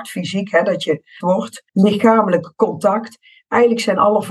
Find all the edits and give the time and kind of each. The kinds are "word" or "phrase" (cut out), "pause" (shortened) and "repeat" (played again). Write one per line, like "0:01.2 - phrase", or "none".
0:01.2 - word
0:01.7 - pause

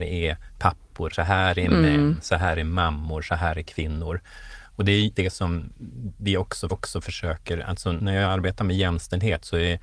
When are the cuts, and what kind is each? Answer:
0:01.1 - word
0:05.1 - word
0:06.7 - repeat

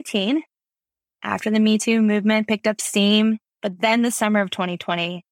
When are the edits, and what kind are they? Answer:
none

